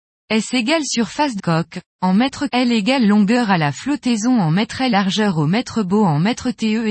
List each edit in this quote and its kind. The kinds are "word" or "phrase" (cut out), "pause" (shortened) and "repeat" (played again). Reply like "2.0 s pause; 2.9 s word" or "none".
1.4 s word; 2.5 s word; 4.9 s word